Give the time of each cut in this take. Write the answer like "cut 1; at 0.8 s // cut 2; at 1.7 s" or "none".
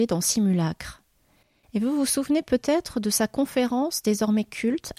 none